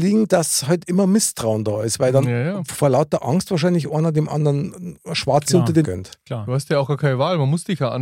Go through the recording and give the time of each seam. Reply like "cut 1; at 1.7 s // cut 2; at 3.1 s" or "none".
cut 1; at 5.8 s